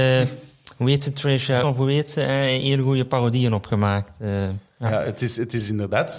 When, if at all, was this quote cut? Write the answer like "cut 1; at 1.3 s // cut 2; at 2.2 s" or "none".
cut 1; at 1.6 s